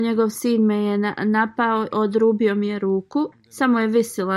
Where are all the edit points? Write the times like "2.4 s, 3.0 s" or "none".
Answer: 1.9 s, 3.3 s